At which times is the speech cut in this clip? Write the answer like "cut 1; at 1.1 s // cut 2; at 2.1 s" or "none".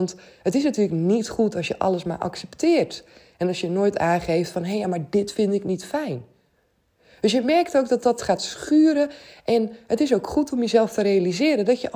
none